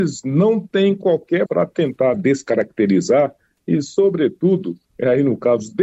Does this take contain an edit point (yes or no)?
yes